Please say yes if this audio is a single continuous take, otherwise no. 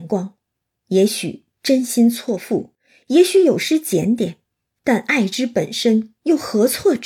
yes